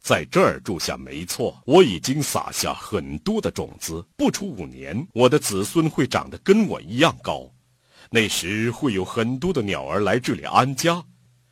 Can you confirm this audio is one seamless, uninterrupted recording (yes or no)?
no